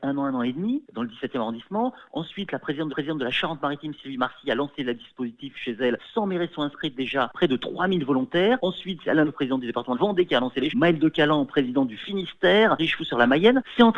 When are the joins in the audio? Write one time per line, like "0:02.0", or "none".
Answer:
0:02.9
0:09.2
0:09.9
0:10.7
0:12.8